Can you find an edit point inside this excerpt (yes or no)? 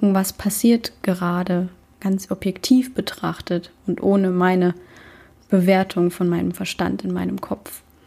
no